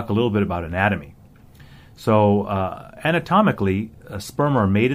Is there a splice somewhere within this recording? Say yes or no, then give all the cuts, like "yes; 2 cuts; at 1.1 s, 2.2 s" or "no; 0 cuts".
no; 0 cuts